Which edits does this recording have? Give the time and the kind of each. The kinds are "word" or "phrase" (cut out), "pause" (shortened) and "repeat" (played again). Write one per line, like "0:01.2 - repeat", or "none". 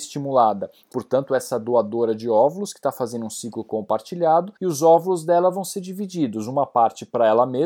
0:00.9 - phrase
0:04.6 - pause